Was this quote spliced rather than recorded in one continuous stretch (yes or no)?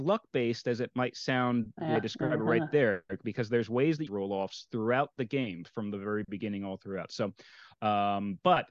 yes